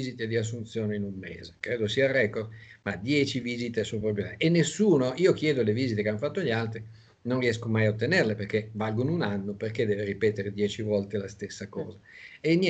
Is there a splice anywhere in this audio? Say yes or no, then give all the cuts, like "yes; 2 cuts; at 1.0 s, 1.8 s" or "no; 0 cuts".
no; 0 cuts